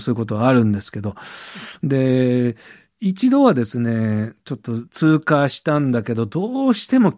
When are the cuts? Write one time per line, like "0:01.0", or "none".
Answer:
0:04.9

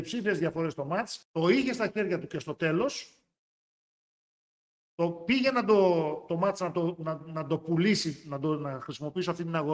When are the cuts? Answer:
0:01.2

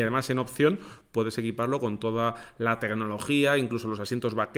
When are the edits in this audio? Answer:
none

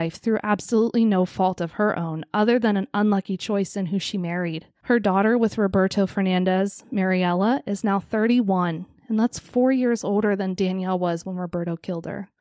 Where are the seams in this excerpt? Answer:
none

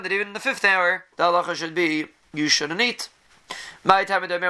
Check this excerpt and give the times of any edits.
0:01.1
0:02.2

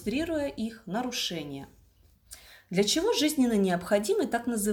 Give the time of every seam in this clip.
0:02.4

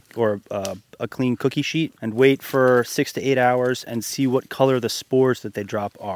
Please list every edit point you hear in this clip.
0:02.0

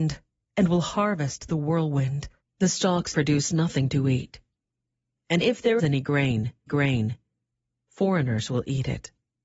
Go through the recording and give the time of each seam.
0:02.4
0:03.1
0:05.4
0:05.8
0:06.7

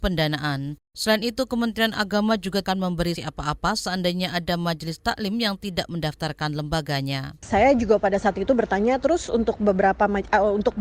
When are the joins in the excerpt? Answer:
0:02.6
0:03.2

